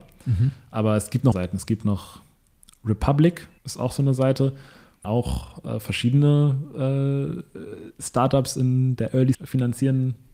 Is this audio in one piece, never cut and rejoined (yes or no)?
no